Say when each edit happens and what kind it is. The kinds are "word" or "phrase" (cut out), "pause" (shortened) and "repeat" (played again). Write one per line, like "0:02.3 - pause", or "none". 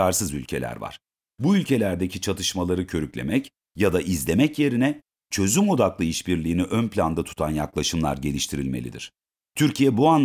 none